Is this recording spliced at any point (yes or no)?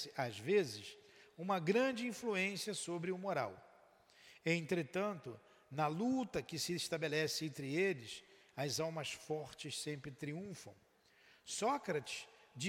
no